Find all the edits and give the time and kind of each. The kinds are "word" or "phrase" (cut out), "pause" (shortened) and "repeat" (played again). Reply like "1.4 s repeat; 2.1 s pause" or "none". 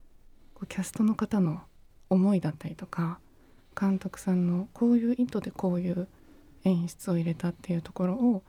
none